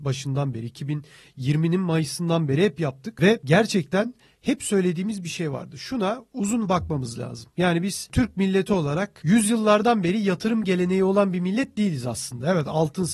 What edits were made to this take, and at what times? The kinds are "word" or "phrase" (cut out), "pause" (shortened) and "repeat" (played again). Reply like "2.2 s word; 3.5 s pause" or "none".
6.7 s word